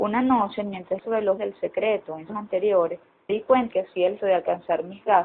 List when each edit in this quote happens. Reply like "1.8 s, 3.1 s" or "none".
1.0 s, 1.4 s, 2.3 s, 3.3 s, 3.7 s, 4.2 s